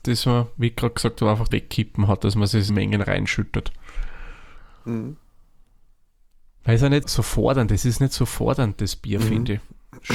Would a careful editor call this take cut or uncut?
cut